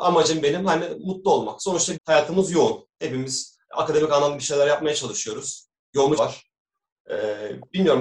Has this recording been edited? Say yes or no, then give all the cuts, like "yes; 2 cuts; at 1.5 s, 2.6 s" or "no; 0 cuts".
yes; 2 cuts; at 1.9 s, 6.2 s